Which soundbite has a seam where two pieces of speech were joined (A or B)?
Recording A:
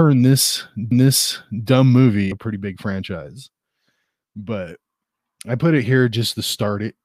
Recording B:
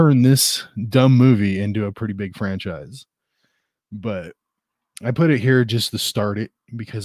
A